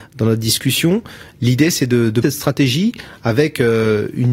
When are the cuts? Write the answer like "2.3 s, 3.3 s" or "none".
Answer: 2.2 s